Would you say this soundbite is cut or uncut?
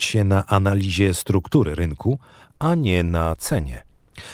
uncut